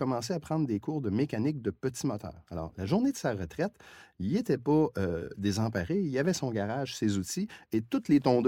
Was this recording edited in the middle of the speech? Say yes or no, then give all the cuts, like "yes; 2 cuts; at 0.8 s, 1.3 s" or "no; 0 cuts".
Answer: no; 0 cuts